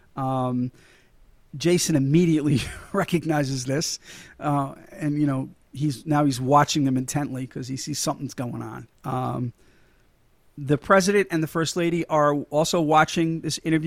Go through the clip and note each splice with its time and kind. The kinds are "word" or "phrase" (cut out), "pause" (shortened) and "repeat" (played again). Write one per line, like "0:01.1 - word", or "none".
0:08.9 - pause